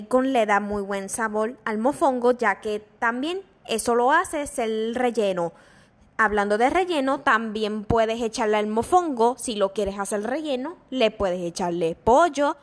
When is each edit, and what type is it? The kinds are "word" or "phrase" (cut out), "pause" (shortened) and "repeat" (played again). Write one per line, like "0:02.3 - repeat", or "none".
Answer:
none